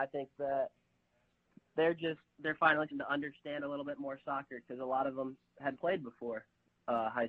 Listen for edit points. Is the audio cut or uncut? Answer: cut